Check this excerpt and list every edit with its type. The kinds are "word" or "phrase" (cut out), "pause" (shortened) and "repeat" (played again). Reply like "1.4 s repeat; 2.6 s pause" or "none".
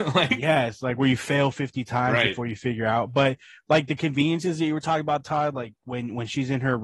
none

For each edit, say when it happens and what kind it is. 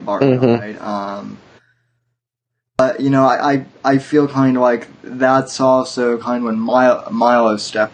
none

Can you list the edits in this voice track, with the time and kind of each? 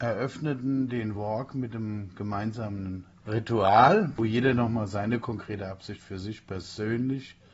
none

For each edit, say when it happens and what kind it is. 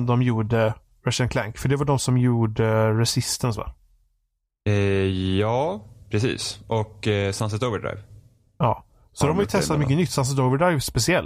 none

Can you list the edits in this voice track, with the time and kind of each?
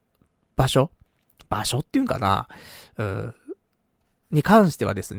none

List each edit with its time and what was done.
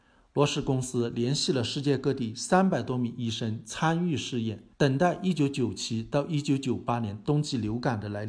4.7 s pause

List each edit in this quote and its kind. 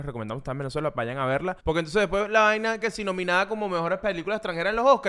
1.6 s pause; 2.8 s word

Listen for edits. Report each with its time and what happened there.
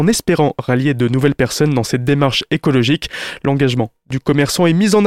none

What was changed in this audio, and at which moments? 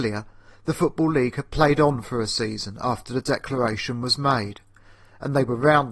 none

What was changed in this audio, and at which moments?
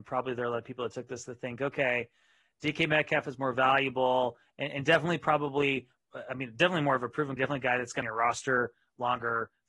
7.4 s word; 8.0 s phrase

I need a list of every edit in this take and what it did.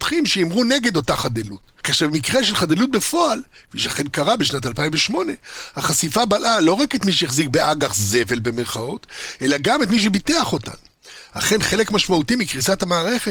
none

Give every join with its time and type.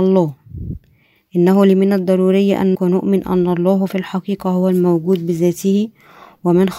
2.7 s word

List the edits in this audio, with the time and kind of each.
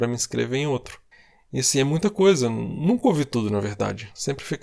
1.1 s pause

